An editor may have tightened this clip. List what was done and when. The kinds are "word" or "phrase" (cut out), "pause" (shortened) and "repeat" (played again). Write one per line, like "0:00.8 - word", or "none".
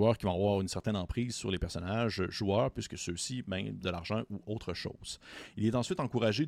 0:03.8 - word